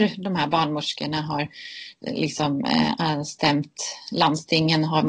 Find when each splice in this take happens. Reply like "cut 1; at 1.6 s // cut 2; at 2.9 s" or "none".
cut 1; at 2.0 s